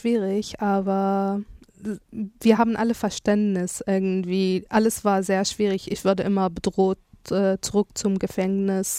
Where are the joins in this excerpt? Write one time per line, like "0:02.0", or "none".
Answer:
none